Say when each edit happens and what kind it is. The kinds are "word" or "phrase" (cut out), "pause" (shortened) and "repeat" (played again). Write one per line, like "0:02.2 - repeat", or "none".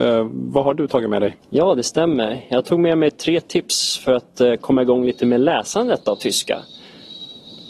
0:01.4 - pause